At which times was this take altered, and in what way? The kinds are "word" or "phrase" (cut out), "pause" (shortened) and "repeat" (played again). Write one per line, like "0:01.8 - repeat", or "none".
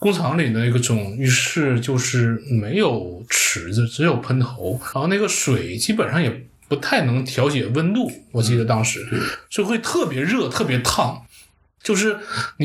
0:04.9 - word